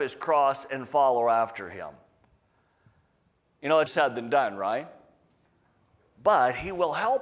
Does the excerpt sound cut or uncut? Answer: cut